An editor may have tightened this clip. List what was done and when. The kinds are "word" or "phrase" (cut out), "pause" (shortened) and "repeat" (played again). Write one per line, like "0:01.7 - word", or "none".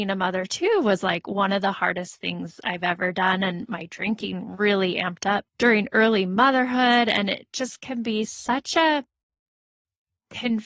0:05.5 - pause